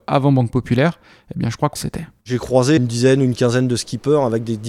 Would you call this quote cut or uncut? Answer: cut